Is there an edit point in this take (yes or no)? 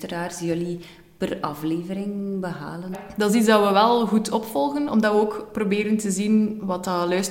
no